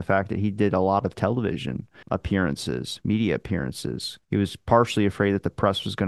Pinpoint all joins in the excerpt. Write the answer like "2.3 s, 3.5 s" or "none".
2.0 s, 4.2 s